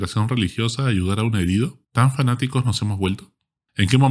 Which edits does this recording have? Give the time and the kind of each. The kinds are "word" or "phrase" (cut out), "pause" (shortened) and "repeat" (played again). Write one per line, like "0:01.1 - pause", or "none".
0:01.9 - pause

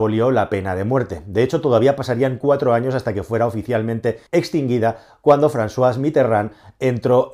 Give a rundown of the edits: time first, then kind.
0:04.3 - pause

